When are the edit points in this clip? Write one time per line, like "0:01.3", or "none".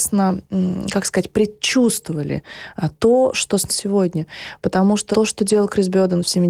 0:03.7
0:05.1